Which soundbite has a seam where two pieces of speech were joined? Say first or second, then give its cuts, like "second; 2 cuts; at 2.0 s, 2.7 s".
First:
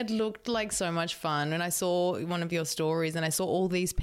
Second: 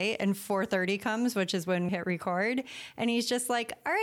second; 1 cut; at 1.9 s